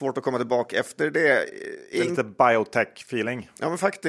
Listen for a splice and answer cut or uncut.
uncut